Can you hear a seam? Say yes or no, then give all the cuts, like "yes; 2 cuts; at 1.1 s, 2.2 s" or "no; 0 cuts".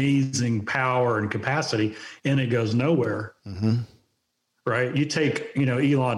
no; 0 cuts